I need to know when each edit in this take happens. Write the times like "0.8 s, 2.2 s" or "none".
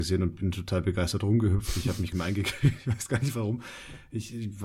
2.1 s